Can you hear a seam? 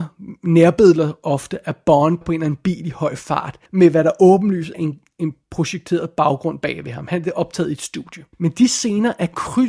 yes; 4 cuts; at 2.2 s, 3.7 s, 4.7 s, 8.3 s

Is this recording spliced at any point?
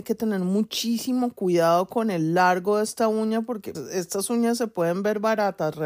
yes; 1 cut; at 3.7 s

